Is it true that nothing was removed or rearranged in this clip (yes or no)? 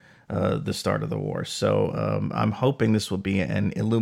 yes